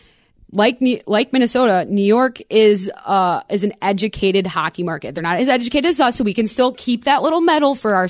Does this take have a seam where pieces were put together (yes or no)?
no